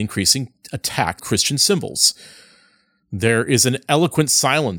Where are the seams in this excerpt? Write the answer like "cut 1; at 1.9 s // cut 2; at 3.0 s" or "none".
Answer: cut 1; at 1.2 s

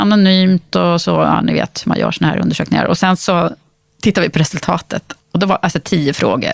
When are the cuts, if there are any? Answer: cut 1; at 5.2 s

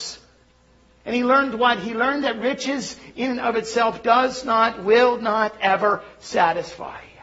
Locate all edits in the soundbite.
none

